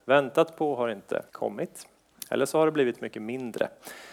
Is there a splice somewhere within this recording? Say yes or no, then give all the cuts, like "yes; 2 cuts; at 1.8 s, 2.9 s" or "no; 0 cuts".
yes; 1 cut; at 1.3 s